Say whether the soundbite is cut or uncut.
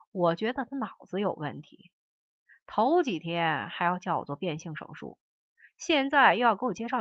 uncut